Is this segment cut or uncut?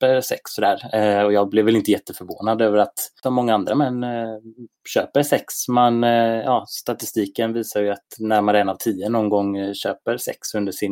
cut